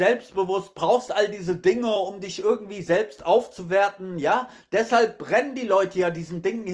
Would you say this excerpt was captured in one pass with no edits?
yes; 0 cuts

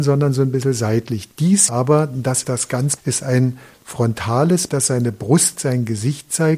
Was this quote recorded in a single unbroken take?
no; 5 cuts; at 1.7 s, 2.4 s, 3.0 s, 4.7 s, 5.6 s

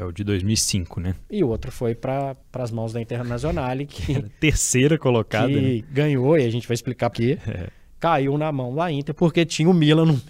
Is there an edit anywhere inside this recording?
yes; 2 cuts; at 2.4 s, 7.1 s

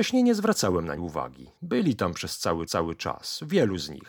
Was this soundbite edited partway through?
yes; 3 cuts; at 1.0 s, 1.6 s, 2.7 s

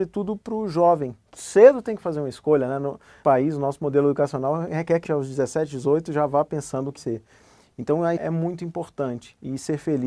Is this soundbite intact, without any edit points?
no; 5 cuts; at 1.4 s, 3.2 s, 5.0 s, 7.0 s, 8.2 s

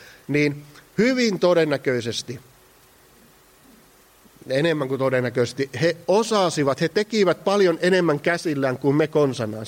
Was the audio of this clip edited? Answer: no; 0 cuts

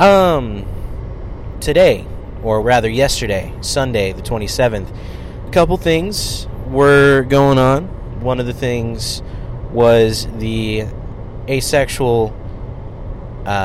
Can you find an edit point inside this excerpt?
yes; 3 cuts; at 1.5 s, 2.6 s, 5.5 s

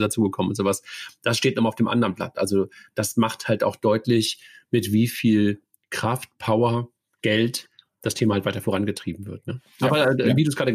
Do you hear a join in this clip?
no; 0 cuts

